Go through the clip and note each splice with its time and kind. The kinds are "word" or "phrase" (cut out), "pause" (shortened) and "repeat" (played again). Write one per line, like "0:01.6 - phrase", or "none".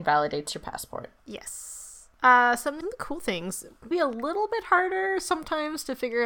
0:02.8 - phrase
0:03.9 - word